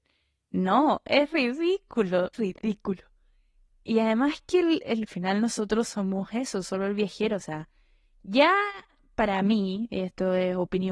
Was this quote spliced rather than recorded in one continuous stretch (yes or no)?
yes